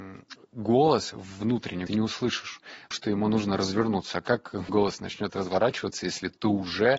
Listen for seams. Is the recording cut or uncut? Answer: cut